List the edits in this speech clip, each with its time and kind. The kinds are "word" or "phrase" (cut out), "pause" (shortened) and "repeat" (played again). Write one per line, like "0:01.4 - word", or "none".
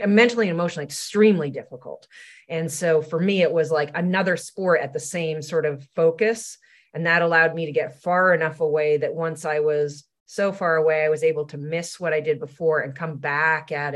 none

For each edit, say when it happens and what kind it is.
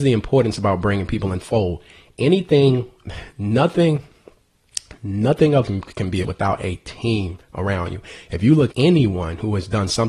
0:01.4 - word
0:05.7 - word
0:06.2 - word
0:08.7 - word

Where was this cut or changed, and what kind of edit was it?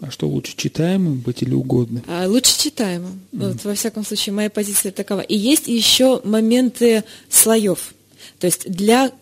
0:03.3 - pause

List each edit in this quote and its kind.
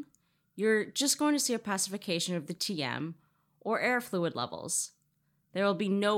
none

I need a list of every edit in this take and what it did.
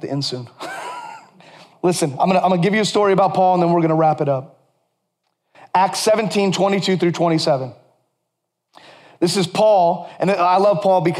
none

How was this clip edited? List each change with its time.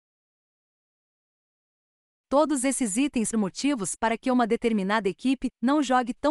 0:03.3 - phrase

